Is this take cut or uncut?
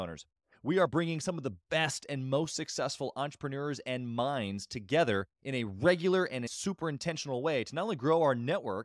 cut